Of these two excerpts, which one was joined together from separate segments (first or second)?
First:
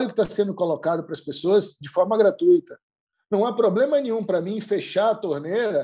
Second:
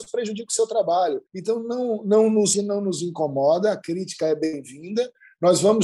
second